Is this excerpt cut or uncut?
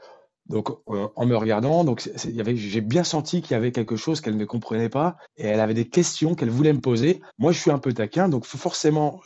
cut